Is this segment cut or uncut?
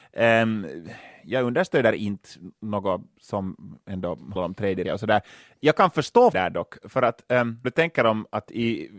cut